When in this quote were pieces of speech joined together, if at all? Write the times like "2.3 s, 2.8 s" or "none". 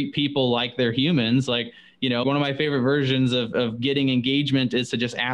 2.2 s